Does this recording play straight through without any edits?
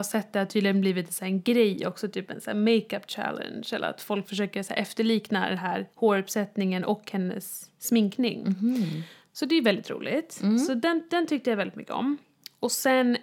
no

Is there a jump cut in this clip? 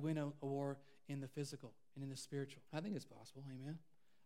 yes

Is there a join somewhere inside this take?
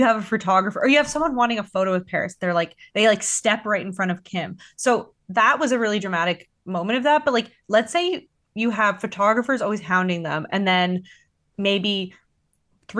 no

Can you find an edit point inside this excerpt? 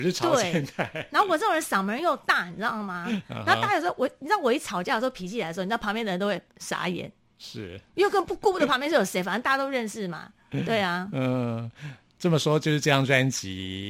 no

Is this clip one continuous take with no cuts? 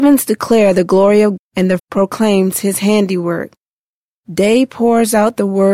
no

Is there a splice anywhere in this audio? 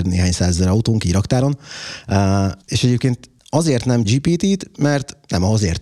yes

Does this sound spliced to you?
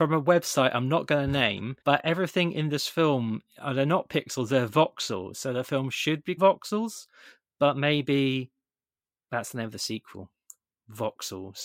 yes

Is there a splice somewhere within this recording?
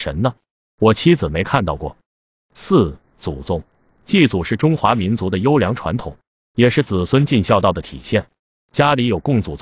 no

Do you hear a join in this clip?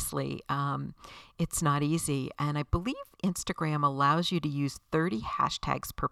no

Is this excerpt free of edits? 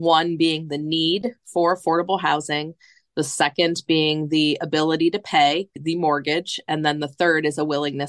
yes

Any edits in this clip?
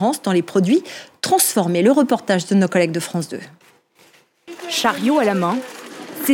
no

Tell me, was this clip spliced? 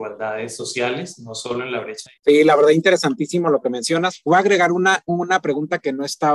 yes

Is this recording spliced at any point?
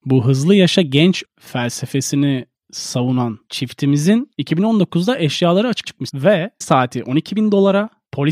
yes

